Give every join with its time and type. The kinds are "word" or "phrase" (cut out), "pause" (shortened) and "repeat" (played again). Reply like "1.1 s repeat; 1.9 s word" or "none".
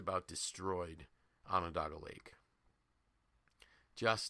none